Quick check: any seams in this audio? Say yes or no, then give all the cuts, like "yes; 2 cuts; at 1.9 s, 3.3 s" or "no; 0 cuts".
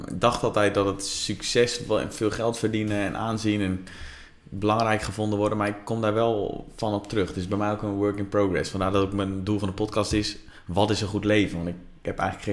no; 0 cuts